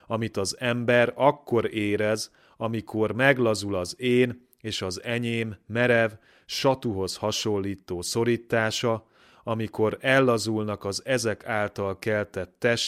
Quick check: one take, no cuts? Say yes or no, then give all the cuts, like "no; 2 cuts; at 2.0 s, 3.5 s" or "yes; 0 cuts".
yes; 0 cuts